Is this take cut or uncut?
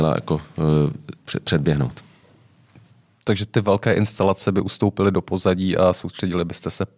uncut